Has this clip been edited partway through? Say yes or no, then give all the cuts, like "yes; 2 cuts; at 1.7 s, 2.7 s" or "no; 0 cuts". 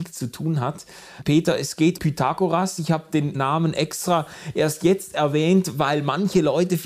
yes; 1 cut; at 2.0 s